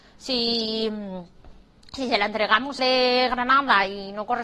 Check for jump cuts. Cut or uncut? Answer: cut